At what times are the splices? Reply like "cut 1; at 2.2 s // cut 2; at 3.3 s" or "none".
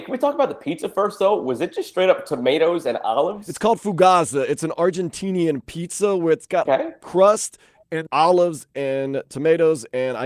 cut 1; at 6.7 s // cut 2; at 8.1 s